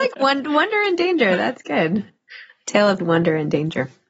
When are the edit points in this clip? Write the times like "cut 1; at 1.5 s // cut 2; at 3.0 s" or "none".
cut 1; at 3.0 s